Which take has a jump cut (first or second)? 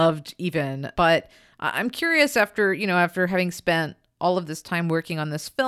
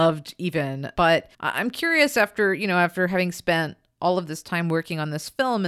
second